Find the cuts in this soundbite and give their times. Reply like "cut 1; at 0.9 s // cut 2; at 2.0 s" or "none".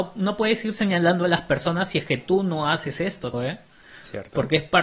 cut 1; at 3.3 s

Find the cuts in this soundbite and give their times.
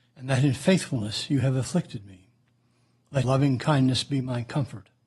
cut 1; at 3.2 s

